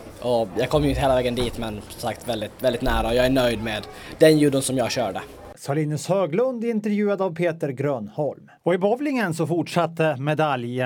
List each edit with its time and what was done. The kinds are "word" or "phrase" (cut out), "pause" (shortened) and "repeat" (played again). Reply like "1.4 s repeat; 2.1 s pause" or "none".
8.6 s pause